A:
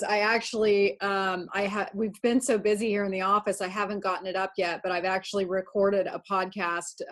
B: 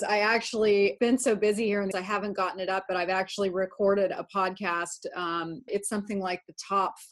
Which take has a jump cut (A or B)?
B